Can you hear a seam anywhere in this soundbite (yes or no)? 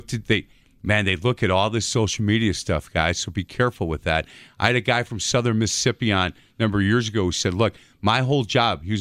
no